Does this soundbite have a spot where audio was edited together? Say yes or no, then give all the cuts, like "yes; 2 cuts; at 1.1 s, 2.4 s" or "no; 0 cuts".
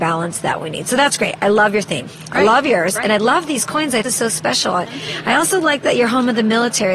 yes; 1 cut; at 4.0 s